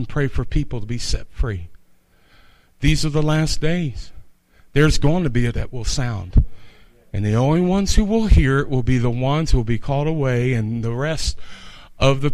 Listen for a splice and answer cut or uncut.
cut